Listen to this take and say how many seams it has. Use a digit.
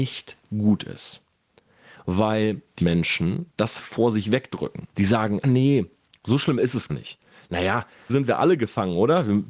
6